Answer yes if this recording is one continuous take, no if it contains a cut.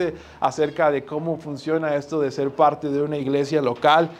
yes